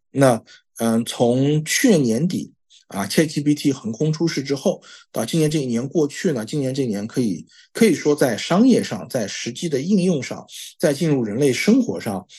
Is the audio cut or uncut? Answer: uncut